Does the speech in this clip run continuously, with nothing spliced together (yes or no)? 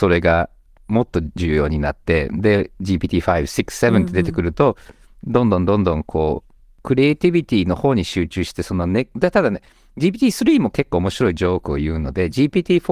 yes